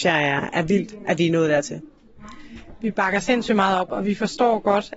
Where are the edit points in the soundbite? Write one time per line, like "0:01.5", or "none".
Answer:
none